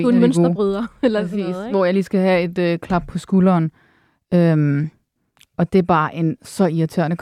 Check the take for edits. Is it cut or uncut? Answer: uncut